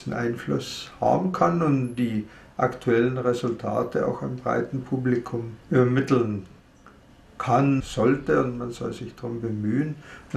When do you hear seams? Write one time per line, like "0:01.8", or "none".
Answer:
0:05.6
0:07.8